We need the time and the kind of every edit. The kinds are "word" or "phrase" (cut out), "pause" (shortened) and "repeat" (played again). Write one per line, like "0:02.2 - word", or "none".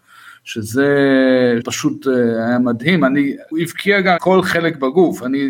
0:01.6 - word
0:03.5 - word
0:04.2 - word